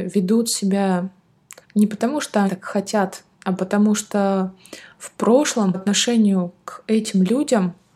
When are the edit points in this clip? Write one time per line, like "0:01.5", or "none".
0:01.6
0:02.5
0:05.7